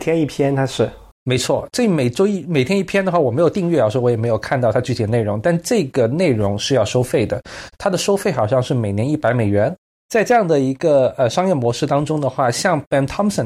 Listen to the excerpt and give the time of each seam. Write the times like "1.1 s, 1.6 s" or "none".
none